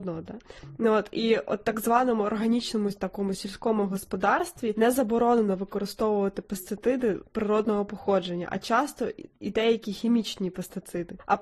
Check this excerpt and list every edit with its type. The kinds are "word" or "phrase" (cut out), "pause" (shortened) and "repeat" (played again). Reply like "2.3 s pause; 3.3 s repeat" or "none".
none